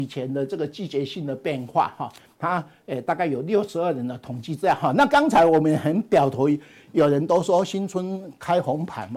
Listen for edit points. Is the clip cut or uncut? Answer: cut